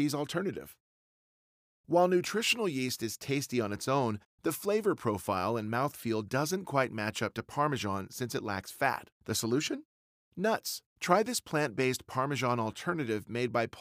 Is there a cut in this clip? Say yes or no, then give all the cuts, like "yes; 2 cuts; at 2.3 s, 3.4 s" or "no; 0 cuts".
yes; 2 cuts; at 9.1 s, 10.9 s